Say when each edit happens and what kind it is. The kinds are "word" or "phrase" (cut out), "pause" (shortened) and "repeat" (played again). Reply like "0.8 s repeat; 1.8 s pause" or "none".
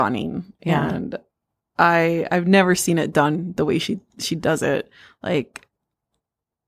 none